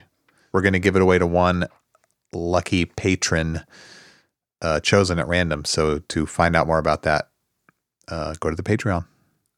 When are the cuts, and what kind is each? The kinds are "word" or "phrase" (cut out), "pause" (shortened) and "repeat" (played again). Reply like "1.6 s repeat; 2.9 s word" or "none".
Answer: none